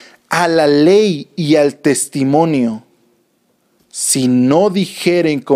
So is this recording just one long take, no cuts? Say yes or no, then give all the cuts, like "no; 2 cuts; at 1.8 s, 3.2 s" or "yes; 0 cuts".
yes; 0 cuts